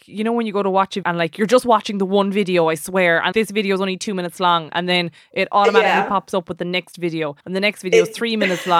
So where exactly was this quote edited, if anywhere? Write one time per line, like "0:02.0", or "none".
0:01.0
0:03.3
0:07.4